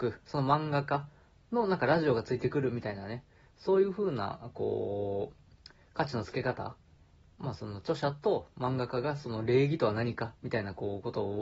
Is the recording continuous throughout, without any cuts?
yes; 0 cuts

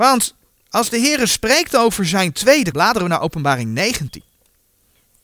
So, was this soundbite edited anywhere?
yes; 1 cut; at 2.7 s

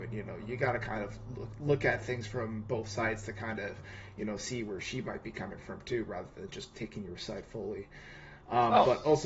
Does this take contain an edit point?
no; 0 cuts

